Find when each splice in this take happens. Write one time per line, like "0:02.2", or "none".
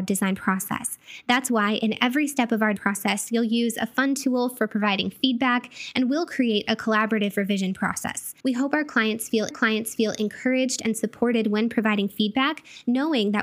0:02.8
0:08.4
0:09.5